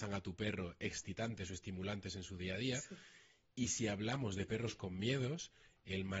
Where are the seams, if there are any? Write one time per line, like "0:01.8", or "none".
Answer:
none